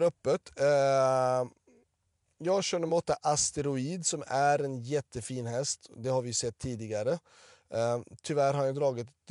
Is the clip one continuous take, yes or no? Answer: yes